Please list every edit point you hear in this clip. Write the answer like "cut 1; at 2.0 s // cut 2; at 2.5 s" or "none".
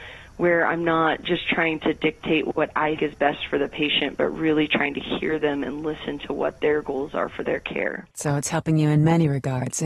cut 1; at 3.0 s // cut 2; at 8.1 s